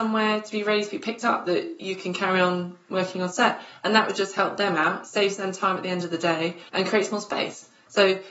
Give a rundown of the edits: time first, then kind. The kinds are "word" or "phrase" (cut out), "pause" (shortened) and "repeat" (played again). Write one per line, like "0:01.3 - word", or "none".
0:01.5 - word
0:06.7 - pause